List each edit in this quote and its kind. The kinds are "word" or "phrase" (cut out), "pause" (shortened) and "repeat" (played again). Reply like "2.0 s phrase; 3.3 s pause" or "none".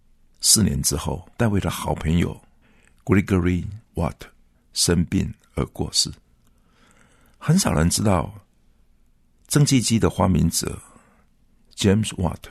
1.3 s pause; 3.8 s pause